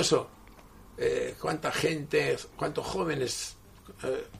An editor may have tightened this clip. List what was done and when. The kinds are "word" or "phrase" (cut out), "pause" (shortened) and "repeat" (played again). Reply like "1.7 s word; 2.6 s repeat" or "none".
2.5 s pause

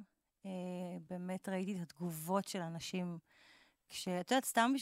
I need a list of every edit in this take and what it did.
none

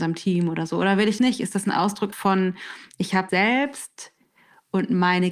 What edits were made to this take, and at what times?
1.2 s word; 2.1 s word; 3.3 s word

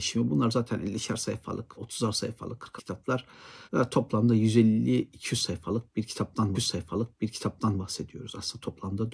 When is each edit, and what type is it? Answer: 1.7 s word; 2.8 s word; 3.7 s pause; 6.5 s repeat

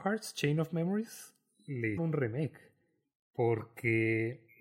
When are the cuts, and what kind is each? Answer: 2.0 s word

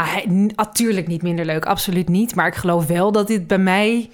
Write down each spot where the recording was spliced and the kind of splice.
none

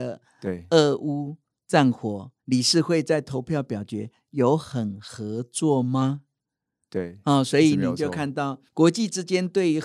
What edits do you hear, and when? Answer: 2.4 s pause; 8.7 s pause

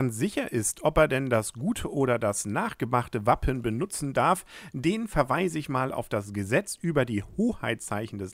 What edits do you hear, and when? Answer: none

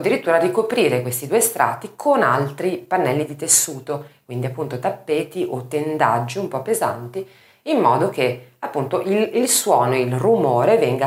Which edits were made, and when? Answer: none

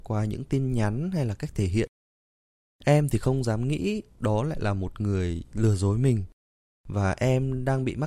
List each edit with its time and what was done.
none

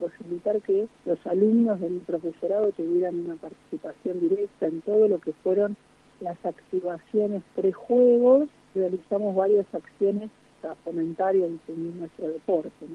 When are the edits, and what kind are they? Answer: 1.0 s pause; 8.7 s word; 10.6 s phrase

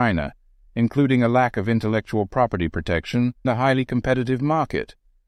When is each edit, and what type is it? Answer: 3.4 s word

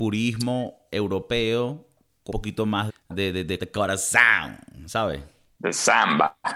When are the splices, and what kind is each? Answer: 2.3 s word; 2.9 s word; 3.6 s word

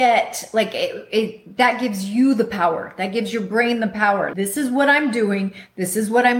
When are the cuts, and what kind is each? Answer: 4.3 s word

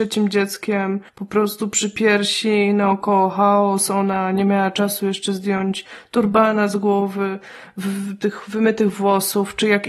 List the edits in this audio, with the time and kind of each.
1.1 s pause

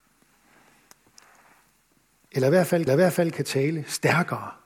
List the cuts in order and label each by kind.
2.9 s repeat

